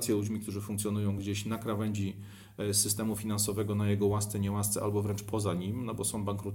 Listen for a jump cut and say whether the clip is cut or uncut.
uncut